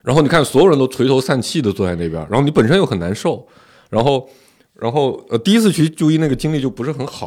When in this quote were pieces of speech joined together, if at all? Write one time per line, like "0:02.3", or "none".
none